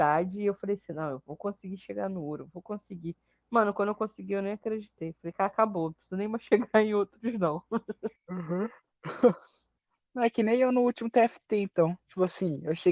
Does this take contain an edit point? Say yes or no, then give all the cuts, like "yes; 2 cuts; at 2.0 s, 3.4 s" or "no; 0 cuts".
no; 0 cuts